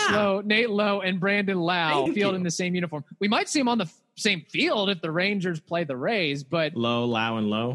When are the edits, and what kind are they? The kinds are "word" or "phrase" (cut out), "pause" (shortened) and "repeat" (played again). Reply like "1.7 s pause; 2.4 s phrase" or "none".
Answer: 2.1 s phrase